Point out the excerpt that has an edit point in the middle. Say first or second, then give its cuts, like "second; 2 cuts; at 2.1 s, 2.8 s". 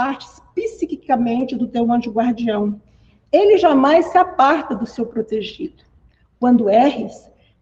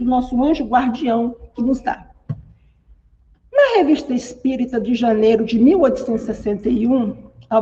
second; 1 cut; at 1.6 s